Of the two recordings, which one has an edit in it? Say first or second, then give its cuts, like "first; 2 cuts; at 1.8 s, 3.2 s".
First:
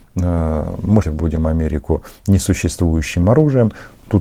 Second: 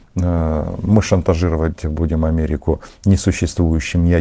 first; 2 cuts; at 1.0 s, 3.2 s